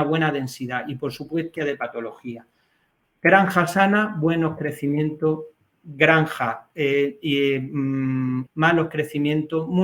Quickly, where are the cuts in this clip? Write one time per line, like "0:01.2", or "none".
0:01.6
0:08.5